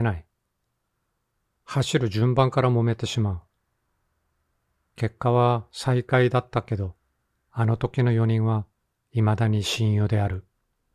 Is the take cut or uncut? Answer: uncut